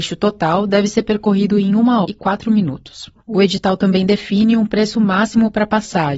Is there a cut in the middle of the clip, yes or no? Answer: yes